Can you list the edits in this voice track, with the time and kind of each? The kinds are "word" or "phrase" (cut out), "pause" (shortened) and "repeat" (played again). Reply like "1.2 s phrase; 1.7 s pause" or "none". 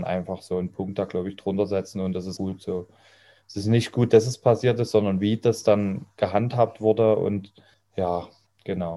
2.4 s word

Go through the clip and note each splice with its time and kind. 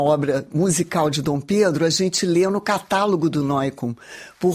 none

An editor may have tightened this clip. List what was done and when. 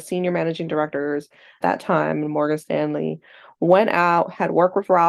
1.6 s word

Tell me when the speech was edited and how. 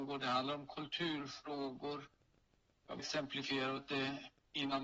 3.0 s word; 3.8 s word

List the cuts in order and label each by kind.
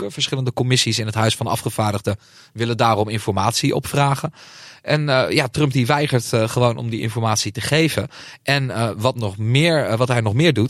none

